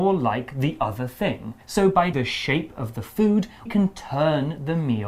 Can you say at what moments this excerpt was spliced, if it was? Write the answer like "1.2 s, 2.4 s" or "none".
1.6 s, 2.1 s, 3.7 s